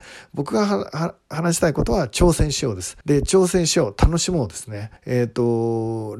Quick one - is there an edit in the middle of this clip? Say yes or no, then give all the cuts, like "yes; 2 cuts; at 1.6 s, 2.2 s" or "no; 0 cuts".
yes; 2 cuts; at 3.0 s, 5.0 s